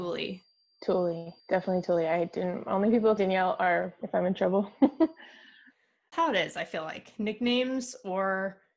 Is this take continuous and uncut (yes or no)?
no